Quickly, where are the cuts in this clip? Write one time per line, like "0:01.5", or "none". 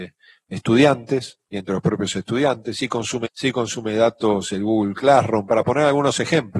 0:03.2